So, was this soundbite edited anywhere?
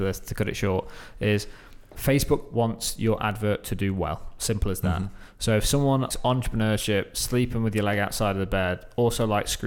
yes; 1 cut; at 6.1 s

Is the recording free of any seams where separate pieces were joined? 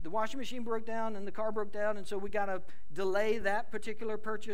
yes; 0 cuts

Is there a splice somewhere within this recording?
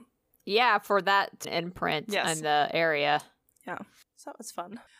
yes; 1 cut; at 1.4 s

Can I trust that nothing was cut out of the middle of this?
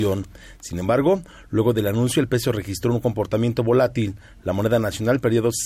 yes; 0 cuts

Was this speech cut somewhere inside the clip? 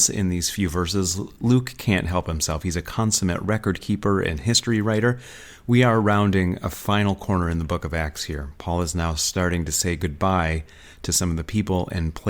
no; 0 cuts

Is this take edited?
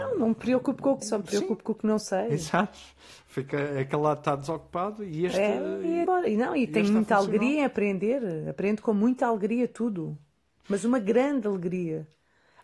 yes; 2 cuts; at 1.0 s, 6.1 s

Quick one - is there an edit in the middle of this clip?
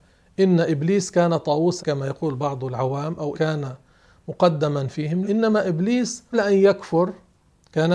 yes; 4 cuts; at 1.8 s, 3.3 s, 5.2 s, 6.3 s

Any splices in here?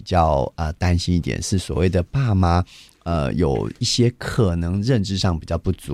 no; 0 cuts

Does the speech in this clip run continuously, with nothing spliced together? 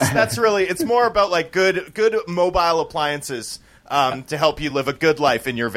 yes; 0 cuts

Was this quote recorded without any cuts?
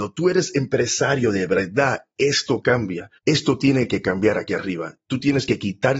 no; 1 cut; at 3.2 s

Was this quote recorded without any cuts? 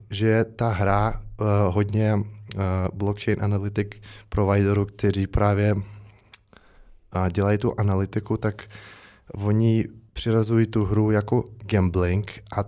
yes; 0 cuts

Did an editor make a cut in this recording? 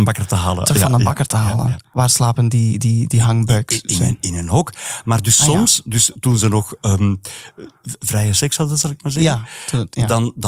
yes; 1 cut; at 7.8 s

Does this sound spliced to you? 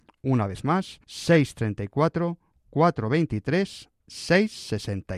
yes; 1 cut; at 1.0 s

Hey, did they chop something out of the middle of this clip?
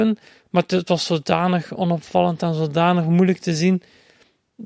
no; 0 cuts

